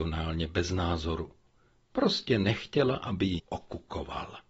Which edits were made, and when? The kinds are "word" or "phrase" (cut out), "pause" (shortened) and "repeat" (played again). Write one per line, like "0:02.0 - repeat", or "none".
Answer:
0:03.4 - word